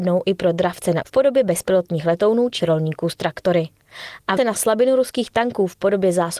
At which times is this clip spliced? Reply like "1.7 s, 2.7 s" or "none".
1.0 s, 2.6 s, 4.4 s